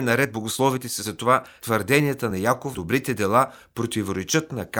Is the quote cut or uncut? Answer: cut